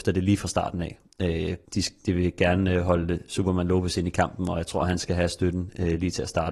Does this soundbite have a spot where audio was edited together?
yes; 1 cut; at 1.7 s

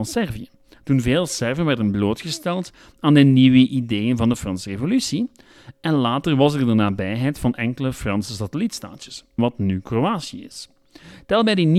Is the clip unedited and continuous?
no; 1 cut; at 9.4 s

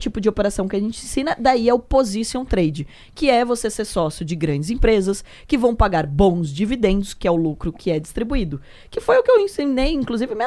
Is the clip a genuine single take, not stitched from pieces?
yes; 0 cuts

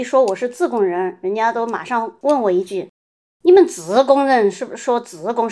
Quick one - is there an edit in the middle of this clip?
no; 0 cuts

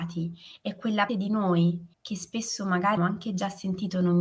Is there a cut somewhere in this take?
yes; 3 cuts; at 1.1 s, 1.9 s, 3.0 s

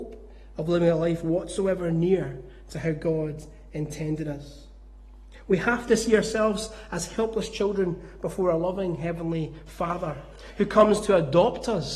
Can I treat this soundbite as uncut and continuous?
yes; 0 cuts

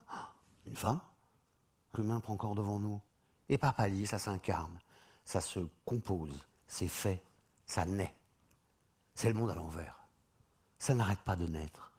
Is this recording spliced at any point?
yes; 1 cut; at 2.0 s

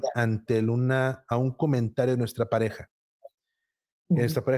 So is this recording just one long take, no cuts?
yes; 0 cuts

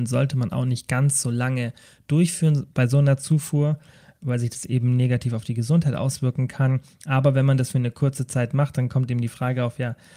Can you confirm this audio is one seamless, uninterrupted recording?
yes; 0 cuts

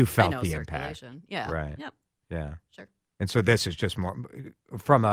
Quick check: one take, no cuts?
yes; 0 cuts

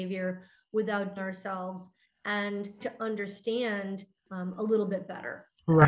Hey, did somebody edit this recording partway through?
yes; 3 cuts; at 1.2 s, 2.8 s, 4.3 s

